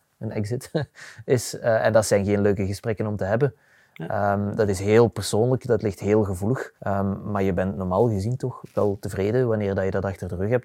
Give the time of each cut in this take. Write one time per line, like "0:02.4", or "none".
0:06.8

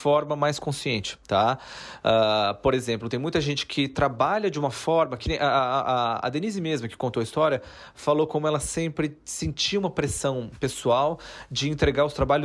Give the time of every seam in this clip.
0:01.2

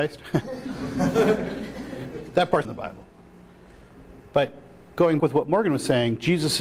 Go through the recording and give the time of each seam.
0:02.6
0:05.2

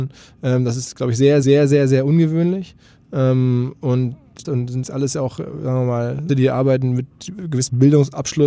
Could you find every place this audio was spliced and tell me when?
0:01.4
0:04.4
0:04.8
0:06.3

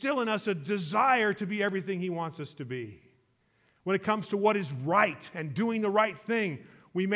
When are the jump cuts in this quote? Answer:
none

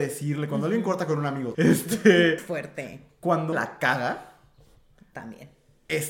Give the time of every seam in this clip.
0:01.5
0:02.4
0:03.5

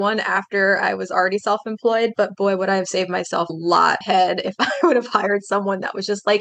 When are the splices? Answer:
0:03.5
0:04.0

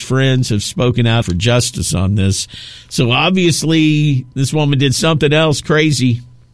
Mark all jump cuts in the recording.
0:01.2

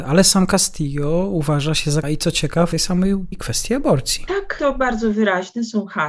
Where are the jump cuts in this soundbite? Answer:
0:02.0
0:02.7
0:03.3

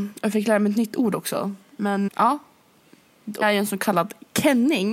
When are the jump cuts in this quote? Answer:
0:02.1
0:03.4

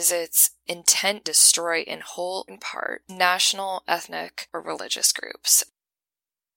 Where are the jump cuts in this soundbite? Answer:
0:01.2
0:02.5
0:04.5

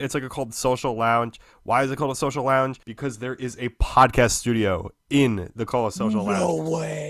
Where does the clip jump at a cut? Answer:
0:02.8
0:05.7

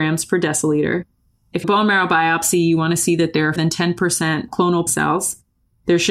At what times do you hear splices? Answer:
0:01.6
0:03.6
0:04.9

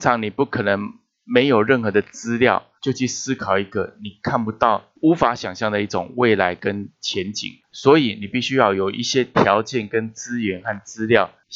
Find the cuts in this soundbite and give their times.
0:02.8

